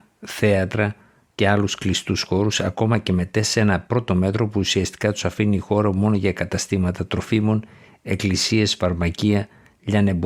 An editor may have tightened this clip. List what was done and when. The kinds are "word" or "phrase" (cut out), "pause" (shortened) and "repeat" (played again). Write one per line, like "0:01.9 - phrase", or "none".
none